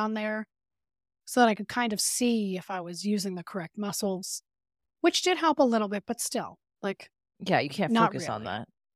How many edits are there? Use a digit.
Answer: 0